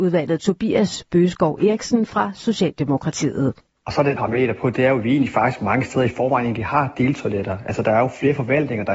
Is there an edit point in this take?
yes; 1 cut; at 4.2 s

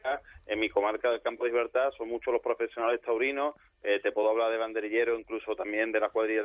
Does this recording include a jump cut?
no; 0 cuts

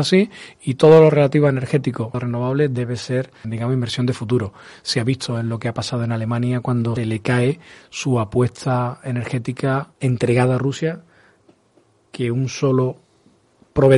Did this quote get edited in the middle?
yes; 4 cuts; at 2.1 s, 3.4 s, 7.0 s, 9.9 s

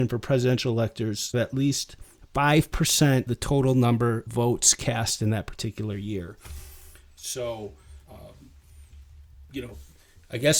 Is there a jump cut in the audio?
yes; 4 cuts; at 1.3 s, 3.3 s, 4.3 s, 8.0 s

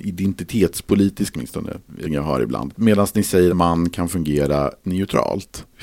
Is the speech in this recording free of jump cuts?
no; 4 cuts; at 1.3 s, 2.0 s, 3.5 s, 4.8 s

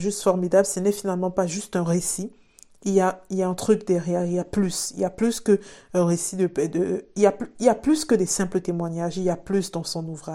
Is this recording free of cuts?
yes; 0 cuts

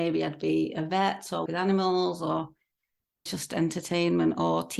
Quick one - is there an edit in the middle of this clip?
yes; 2 cuts; at 1.5 s, 3.3 s

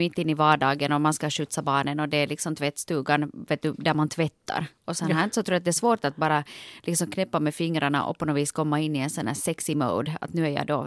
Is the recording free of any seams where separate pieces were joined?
yes; 0 cuts

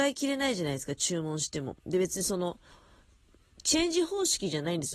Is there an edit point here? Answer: yes; 1 cut; at 1.8 s

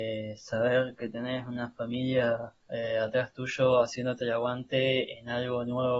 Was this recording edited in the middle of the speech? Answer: yes; 1 cut; at 2.6 s

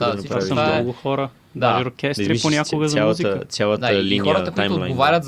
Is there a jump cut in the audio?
no; 0 cuts

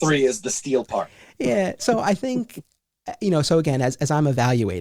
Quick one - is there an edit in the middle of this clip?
no; 0 cuts

